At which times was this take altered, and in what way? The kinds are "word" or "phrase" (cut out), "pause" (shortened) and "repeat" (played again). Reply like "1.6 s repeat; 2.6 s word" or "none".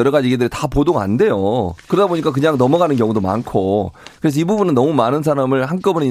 1.8 s pause